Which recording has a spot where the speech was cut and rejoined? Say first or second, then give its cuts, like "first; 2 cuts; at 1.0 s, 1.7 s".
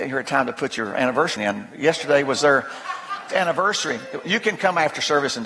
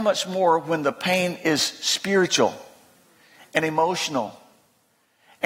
first; 2 cuts; at 1.4 s, 3.3 s